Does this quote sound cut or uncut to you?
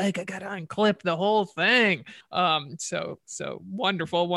cut